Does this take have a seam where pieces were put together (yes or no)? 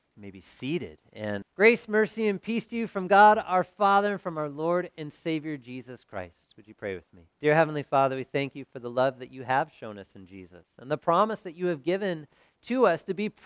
yes